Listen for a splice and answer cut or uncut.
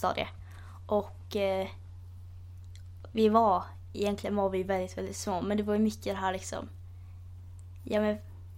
uncut